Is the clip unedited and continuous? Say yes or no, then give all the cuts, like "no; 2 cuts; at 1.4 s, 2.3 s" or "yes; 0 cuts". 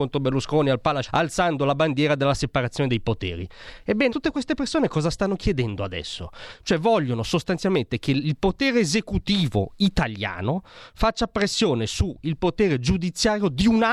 no; 2 cuts; at 1.0 s, 4.1 s